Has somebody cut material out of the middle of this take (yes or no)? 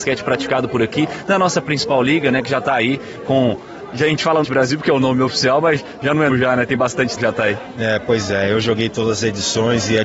yes